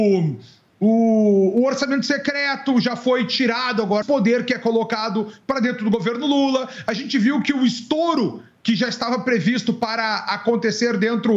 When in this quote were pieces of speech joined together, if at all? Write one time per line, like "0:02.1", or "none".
0:04.0